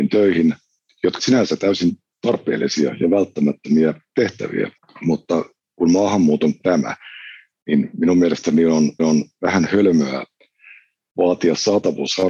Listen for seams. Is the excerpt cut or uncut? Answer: cut